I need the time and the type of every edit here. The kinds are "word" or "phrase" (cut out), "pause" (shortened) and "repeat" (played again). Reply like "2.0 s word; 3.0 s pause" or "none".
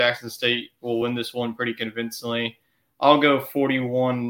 none